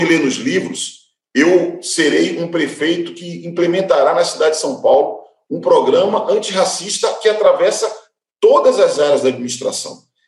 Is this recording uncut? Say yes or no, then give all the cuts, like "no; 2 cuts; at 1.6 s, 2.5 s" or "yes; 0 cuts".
yes; 0 cuts